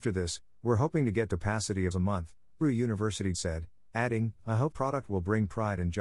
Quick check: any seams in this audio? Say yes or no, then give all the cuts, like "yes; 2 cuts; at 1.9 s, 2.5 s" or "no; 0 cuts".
yes; 5 cuts; at 1.3 s, 1.9 s, 2.6 s, 3.3 s, 4.7 s